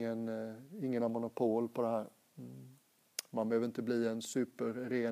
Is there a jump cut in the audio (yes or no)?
no